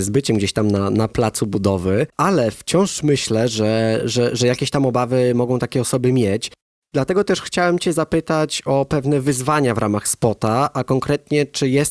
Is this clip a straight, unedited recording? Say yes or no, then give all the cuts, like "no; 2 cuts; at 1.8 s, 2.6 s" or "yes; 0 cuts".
yes; 0 cuts